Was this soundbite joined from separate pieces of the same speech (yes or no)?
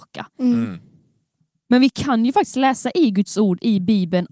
no